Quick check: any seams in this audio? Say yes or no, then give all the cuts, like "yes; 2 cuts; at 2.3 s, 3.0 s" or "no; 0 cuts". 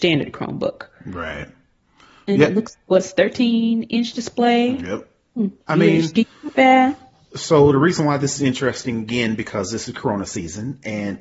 yes; 1 cut; at 5.6 s